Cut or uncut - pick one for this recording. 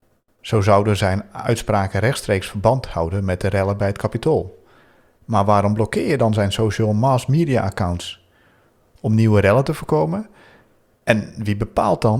uncut